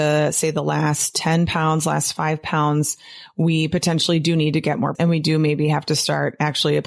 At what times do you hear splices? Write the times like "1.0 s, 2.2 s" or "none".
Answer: 4.9 s